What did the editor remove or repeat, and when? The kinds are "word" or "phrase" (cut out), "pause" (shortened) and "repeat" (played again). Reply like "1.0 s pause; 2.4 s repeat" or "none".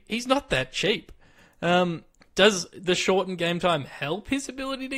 2.1 s pause